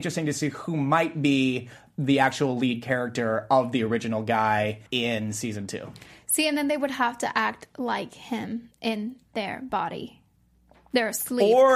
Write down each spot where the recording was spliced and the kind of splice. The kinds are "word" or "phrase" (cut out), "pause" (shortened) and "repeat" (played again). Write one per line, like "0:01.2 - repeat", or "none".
0:04.9 - pause